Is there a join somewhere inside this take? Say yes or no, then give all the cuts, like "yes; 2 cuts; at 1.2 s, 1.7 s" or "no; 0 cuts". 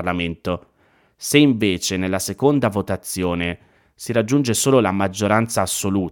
no; 0 cuts